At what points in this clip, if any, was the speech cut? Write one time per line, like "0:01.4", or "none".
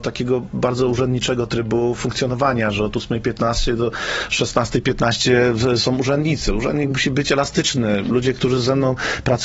none